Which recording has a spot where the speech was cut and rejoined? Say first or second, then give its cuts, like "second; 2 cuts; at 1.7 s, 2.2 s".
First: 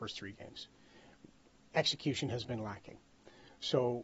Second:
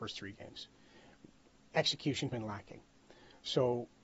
second; 1 cut; at 2.3 s